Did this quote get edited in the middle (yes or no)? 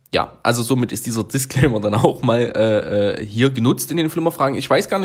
no